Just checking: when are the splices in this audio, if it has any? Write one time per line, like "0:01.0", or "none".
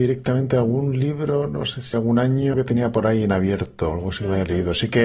0:01.9
0:02.5
0:03.9